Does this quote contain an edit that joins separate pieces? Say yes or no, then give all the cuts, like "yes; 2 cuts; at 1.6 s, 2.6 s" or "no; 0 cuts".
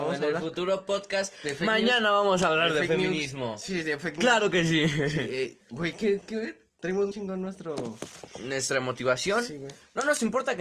yes; 3 cuts; at 5.6 s, 6.2 s, 7.1 s